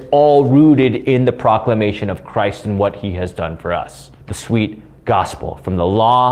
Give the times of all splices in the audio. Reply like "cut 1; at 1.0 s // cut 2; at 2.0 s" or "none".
cut 1; at 4.2 s